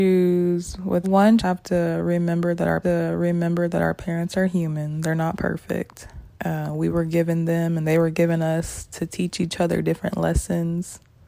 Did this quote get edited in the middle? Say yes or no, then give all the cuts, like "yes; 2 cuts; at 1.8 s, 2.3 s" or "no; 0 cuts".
yes; 4 cuts; at 1.0 s, 1.4 s, 2.8 s, 6.3 s